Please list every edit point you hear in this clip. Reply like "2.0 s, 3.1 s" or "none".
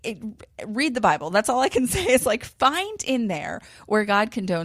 none